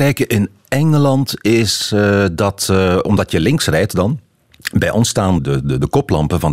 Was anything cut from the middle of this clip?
yes; 1 cut; at 5.4 s

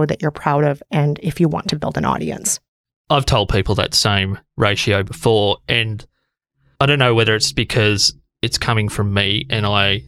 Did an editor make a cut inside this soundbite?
no; 0 cuts

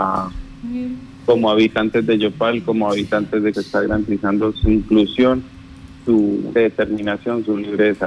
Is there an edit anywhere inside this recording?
yes; 3 cuts; at 3.5 s, 4.5 s, 6.6 s

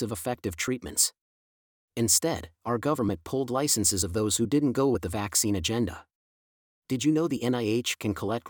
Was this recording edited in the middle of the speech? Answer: no; 0 cuts

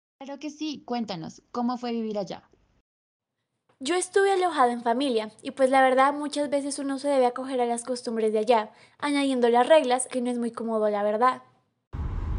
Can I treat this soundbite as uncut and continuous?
no; 1 cut; at 10.1 s

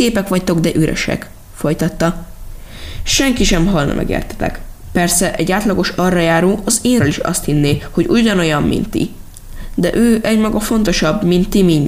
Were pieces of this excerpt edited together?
yes; 1 cut; at 7.0 s

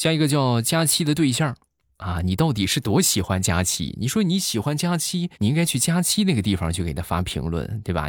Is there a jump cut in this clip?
yes; 1 cut; at 5.3 s

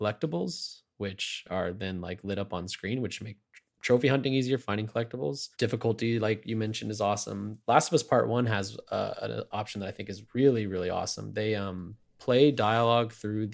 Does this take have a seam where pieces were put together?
yes; 3 cuts; at 4.6 s, 5.5 s, 10.3 s

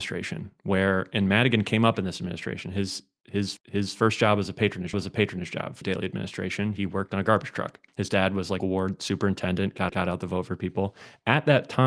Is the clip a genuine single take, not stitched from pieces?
no; 6 cuts; at 3.6 s, 4.9 s, 5.8 s, 7.9 s, 8.6 s, 9.9 s

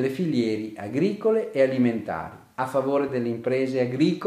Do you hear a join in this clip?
no; 0 cuts

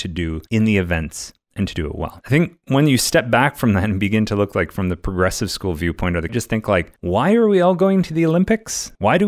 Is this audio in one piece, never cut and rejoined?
no; 1 cut; at 6.3 s

